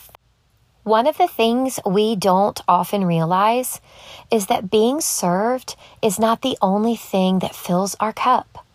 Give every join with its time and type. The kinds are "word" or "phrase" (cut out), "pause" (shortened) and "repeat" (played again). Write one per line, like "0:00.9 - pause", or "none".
none